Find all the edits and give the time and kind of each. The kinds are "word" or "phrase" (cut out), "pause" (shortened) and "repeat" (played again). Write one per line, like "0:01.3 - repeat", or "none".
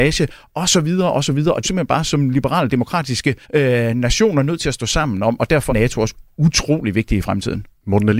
0:01.6 - phrase
0:03.4 - pause
0:05.7 - word